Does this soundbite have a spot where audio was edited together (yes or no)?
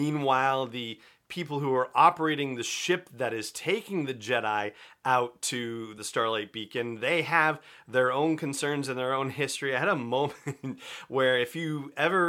no